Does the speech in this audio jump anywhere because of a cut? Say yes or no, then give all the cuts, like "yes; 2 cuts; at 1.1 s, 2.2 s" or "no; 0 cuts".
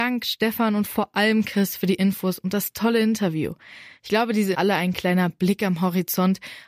yes; 1 cut; at 4.5 s